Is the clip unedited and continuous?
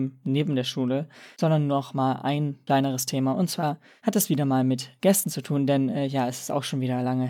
yes; 0 cuts

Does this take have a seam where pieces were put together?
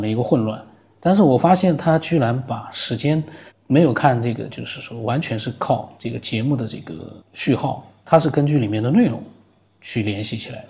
yes; 5 cuts; at 3.5 s, 6.0 s, 7.2 s, 8.0 s, 9.7 s

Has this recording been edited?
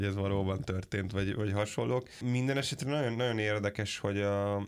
no; 0 cuts

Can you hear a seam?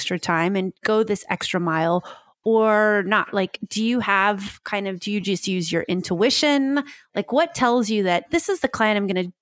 no; 0 cuts

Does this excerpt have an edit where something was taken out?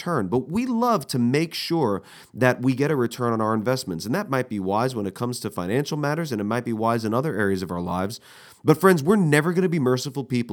no; 0 cuts

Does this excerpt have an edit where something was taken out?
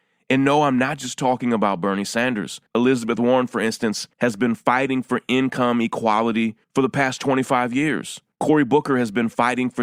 yes; 4 cuts; at 2.7 s, 4.1 s, 6.6 s, 8.3 s

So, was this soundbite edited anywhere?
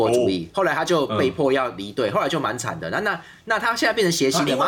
no; 0 cuts

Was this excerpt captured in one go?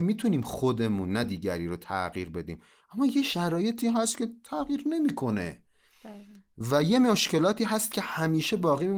yes; 0 cuts

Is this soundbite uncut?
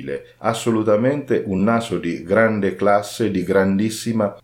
yes; 0 cuts

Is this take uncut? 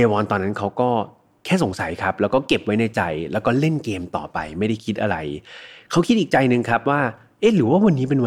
yes; 0 cuts

